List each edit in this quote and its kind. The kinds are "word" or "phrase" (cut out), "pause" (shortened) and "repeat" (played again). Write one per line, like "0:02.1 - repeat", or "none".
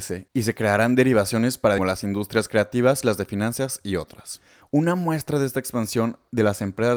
0:01.8 - phrase